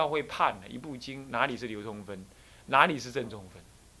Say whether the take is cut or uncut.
uncut